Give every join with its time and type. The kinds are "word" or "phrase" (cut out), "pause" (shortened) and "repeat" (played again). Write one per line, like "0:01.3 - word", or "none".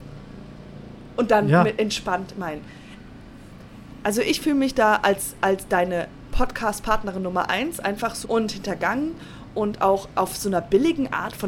0:08.2 - phrase